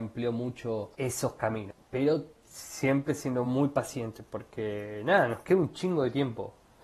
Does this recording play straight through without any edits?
yes; 0 cuts

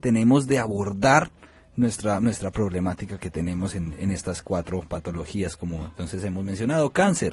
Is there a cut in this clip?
no; 0 cuts

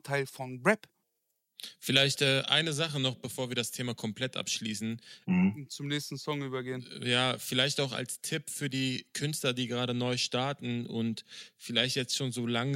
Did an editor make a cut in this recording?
no; 0 cuts

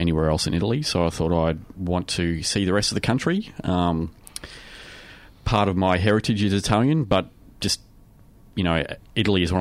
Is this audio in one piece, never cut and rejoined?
no; 1 cut; at 1.7 s

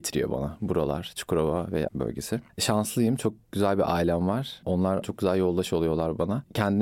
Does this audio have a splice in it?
yes; 2 cuts; at 1.9 s, 5.0 s

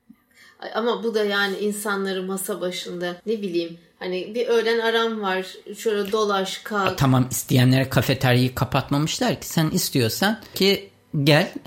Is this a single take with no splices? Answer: no; 2 cuts; at 3.2 s, 10.5 s

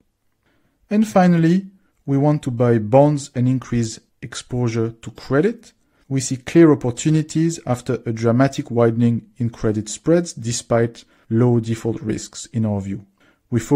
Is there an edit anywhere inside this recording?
no; 0 cuts

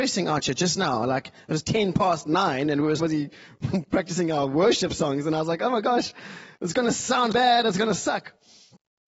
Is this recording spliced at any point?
yes; 2 cuts; at 3.0 s, 7.3 s

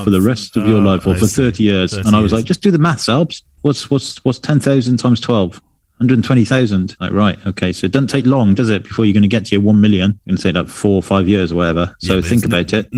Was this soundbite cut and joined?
no; 0 cuts

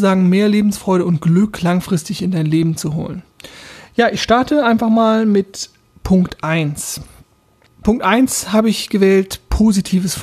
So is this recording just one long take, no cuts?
yes; 0 cuts

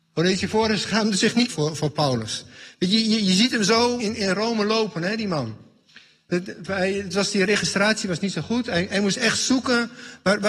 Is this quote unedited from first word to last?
no; 2 cuts; at 1.5 s, 4.0 s

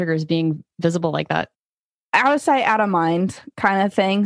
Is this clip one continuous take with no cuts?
yes; 0 cuts

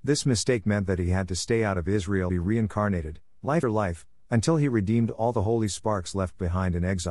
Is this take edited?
yes; 2 cuts; at 2.3 s, 3.6 s

